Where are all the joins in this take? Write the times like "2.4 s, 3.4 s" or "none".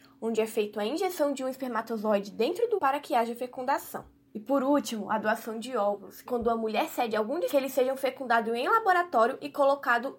2.8 s, 4.3 s, 6.3 s, 7.5 s